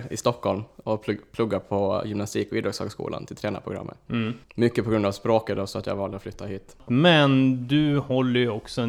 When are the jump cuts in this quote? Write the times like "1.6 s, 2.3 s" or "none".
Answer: 4.4 s